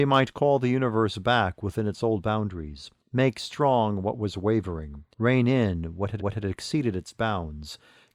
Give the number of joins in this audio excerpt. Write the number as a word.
three